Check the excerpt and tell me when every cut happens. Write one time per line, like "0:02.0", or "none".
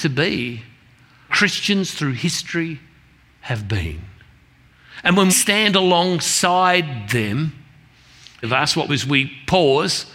0:01.3
0:05.3
0:08.4
0:08.9